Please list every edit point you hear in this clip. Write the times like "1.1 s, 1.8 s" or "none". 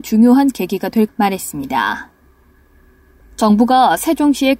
1.1 s